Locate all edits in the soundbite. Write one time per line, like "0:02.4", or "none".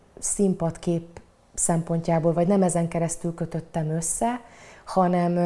none